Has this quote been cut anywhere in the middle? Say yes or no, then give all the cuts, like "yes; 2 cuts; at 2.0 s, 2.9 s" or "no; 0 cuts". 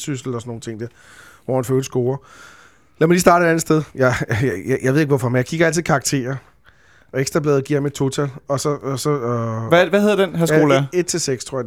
yes; 1 cut; at 3.9 s